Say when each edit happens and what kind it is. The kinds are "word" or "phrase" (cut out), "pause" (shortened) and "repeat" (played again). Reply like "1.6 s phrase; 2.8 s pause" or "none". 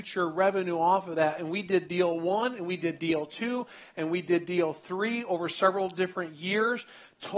none